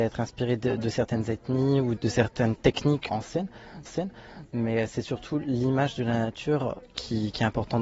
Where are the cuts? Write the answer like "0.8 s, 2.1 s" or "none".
2.0 s, 3.1 s, 3.9 s